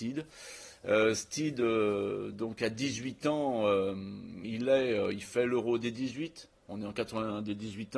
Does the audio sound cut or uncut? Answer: uncut